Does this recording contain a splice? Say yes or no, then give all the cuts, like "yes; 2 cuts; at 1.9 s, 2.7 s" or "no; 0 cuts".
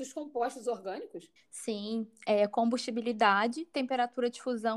yes; 1 cut; at 1.4 s